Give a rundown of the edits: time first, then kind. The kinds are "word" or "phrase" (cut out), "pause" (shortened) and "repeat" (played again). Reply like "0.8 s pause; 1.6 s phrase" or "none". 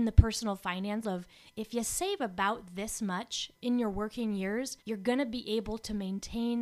1.0 s word; 3.5 s phrase; 4.8 s pause